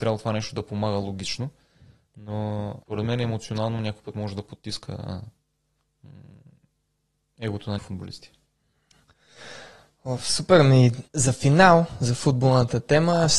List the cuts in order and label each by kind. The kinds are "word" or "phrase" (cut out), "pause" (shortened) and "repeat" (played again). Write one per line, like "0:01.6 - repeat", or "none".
0:02.8 - pause
0:07.8 - word
0:11.1 - pause